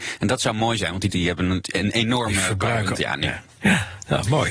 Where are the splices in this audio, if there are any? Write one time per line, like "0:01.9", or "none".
0:01.1
0:02.9